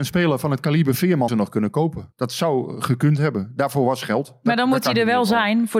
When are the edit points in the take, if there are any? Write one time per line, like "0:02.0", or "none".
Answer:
0:01.3
0:02.1